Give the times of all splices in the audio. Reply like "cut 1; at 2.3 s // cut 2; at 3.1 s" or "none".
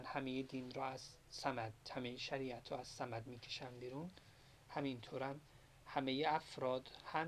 none